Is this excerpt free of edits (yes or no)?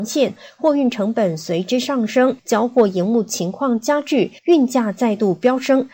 no